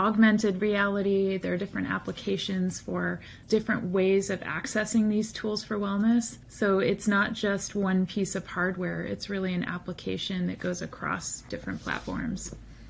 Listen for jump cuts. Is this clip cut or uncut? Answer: cut